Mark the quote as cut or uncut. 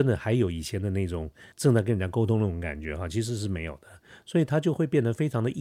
cut